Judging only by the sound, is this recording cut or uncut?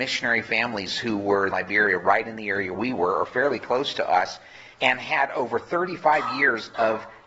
cut